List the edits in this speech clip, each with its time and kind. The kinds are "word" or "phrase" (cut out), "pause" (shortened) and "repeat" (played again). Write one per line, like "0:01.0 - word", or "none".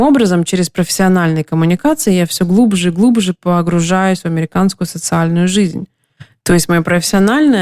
none